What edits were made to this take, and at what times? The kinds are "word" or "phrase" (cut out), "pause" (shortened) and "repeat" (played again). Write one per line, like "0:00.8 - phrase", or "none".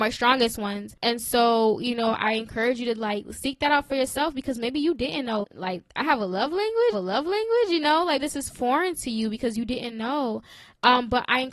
0:05.4 - word
0:06.9 - repeat
0:08.2 - word